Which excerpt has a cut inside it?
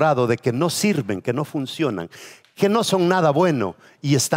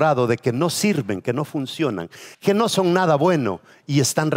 second; 1 cut; at 2.3 s

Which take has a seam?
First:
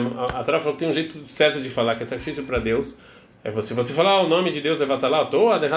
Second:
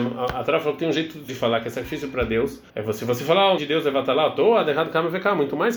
second; 3 cuts; at 1.3 s, 2.7 s, 3.6 s

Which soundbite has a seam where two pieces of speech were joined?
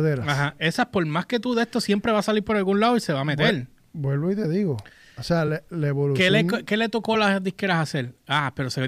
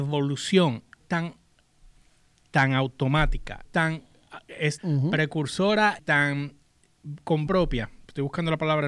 second; 5 cuts; at 1.0 s, 3.6 s, 4.8 s, 6.0 s, 7.5 s

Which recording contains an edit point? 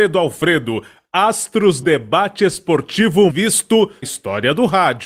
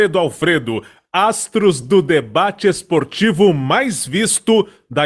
first; 3 cuts; at 1.8 s, 3.3 s, 4.0 s

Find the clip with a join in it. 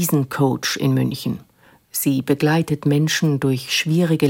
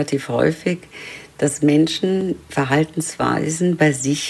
second; 1 cut; at 2.4 s

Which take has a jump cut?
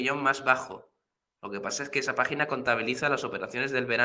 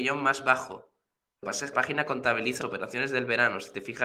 second; 3 cuts; at 1.4 s, 1.7 s, 2.6 s

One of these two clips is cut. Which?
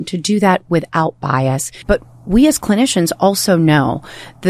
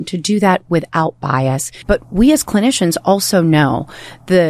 second; 1 cut; at 2.0 s

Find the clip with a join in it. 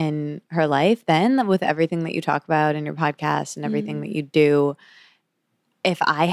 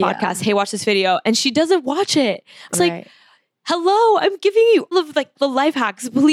second; 3 cuts; at 2.7 s, 4.9 s, 5.4 s

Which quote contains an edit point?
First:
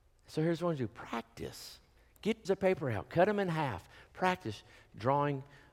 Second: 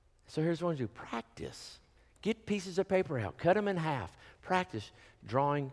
first; 1 cut; at 2.4 s

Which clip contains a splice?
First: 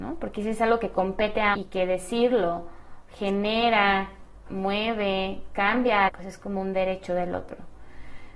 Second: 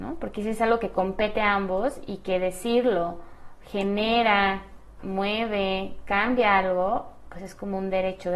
first; 2 cuts; at 1.5 s, 6.1 s

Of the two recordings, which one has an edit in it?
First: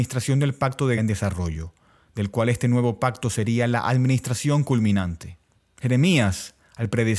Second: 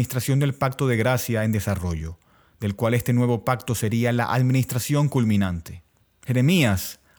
first; 1 cut; at 1.0 s

